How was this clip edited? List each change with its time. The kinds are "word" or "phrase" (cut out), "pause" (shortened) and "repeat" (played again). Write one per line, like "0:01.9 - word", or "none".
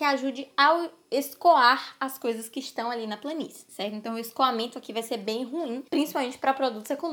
0:05.9 - pause